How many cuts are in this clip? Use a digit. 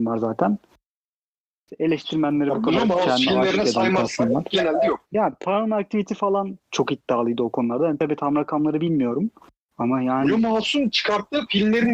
2